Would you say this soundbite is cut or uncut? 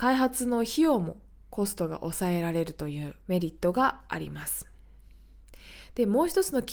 cut